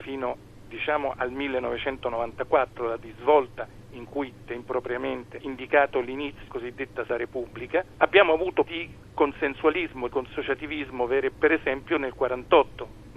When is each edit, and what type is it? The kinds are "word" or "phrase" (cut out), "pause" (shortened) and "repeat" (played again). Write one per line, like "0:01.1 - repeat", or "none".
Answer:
0:03.0 - word
0:04.5 - word
0:05.4 - word
0:06.5 - word
0:07.1 - word
0:08.6 - word
0:10.1 - word
0:11.3 - word

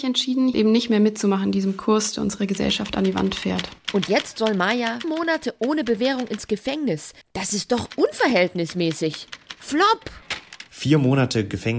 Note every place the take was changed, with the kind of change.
0:05.0 - word
0:07.2 - pause

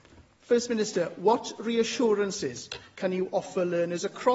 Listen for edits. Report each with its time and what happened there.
none

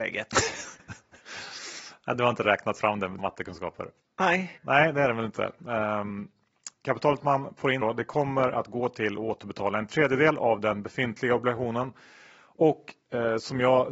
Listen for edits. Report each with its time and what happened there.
0:03.2 - word
0:04.6 - word
0:06.8 - word
0:07.8 - word

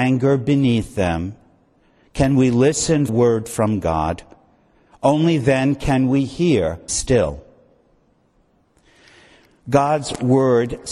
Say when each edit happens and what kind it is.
0:03.1 - phrase
0:06.9 - phrase

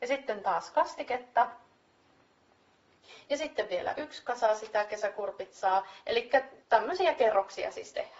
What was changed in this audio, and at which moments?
0:06.6 - pause

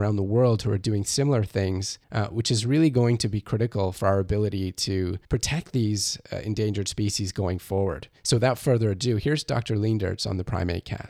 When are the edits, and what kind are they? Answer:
0:02.0 - pause
0:05.2 - pause
0:08.2 - pause

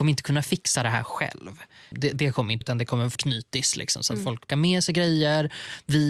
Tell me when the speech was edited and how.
0:02.1 - word
0:02.6 - word
0:03.1 - word
0:04.5 - word

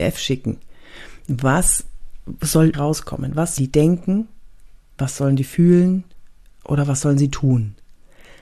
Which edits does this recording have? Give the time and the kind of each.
0:02.7 - word
0:03.6 - word

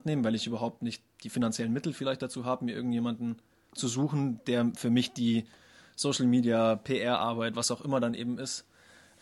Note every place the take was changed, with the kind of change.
none

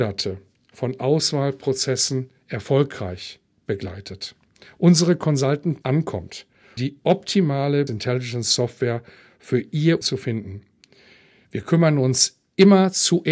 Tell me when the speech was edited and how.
0:05.8 - phrase
0:06.8 - word
0:07.9 - word
0:10.0 - word

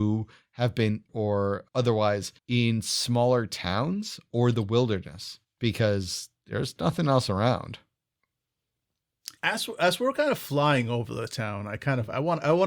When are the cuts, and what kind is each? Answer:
0:01.1 - word
0:02.4 - pause
0:05.4 - pause
0:09.4 - pause

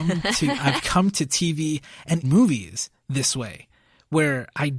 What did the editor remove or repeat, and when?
0:02.2 - word

